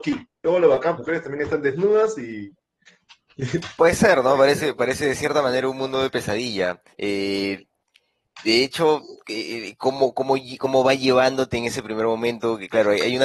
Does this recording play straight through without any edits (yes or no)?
no